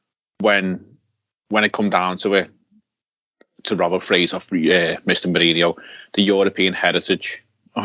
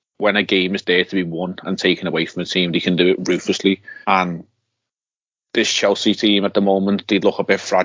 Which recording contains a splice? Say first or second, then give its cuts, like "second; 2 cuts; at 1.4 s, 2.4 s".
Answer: second; 1 cut; at 4.0 s